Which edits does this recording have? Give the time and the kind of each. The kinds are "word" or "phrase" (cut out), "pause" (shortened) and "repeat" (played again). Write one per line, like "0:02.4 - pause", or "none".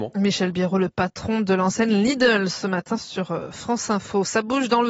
none